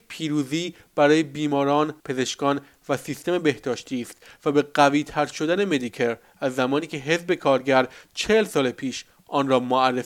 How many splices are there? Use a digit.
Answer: 1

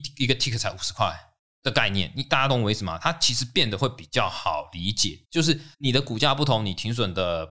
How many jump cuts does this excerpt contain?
3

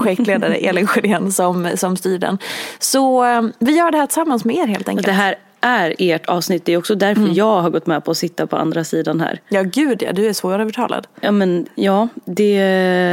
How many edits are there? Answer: 0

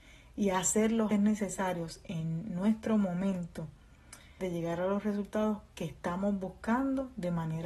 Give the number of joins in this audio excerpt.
2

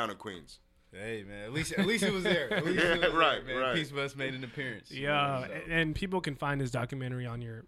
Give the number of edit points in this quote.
0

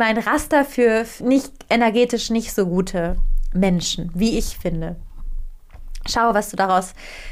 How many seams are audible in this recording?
0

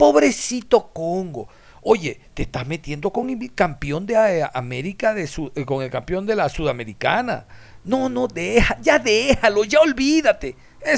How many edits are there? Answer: 0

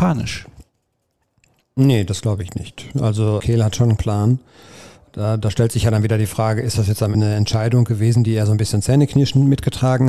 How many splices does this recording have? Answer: 3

